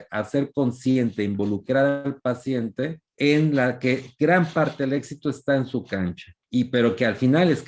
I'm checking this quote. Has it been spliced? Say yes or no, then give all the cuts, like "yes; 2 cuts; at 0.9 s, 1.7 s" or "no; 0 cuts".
yes; 2 cuts; at 3.1 s, 6.4 s